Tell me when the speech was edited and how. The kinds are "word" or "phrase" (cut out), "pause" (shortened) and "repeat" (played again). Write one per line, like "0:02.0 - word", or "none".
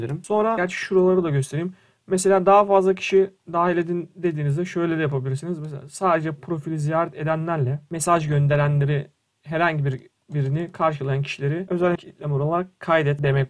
0:12.0 - word